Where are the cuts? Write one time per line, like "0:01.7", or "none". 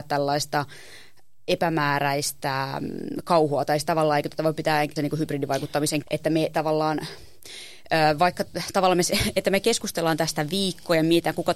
0:05.0
0:06.0